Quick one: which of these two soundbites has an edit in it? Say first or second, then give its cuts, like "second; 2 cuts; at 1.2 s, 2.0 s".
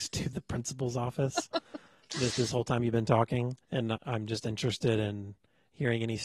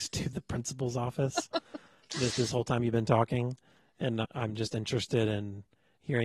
first; 1 cut; at 3.6 s